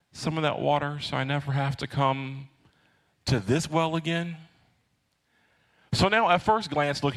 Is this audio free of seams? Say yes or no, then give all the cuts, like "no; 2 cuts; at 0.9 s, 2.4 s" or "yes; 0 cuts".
yes; 0 cuts